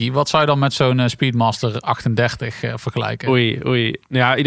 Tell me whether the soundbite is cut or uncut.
uncut